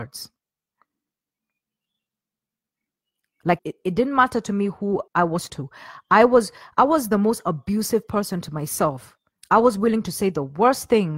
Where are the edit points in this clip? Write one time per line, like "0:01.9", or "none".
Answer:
0:03.6
0:05.1
0:05.5
0:09.3